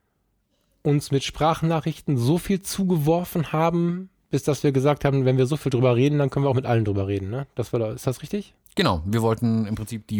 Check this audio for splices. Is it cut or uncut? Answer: uncut